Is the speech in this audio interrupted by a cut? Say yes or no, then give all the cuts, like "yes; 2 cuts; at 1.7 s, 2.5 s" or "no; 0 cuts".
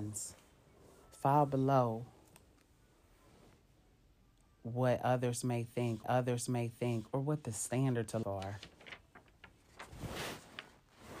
yes; 2 cuts; at 6.0 s, 8.2 s